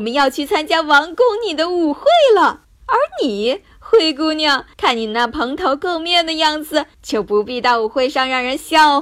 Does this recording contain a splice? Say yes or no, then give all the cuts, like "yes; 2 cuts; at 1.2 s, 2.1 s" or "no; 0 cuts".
yes; 3 cuts; at 2.6 s, 4.7 s, 6.9 s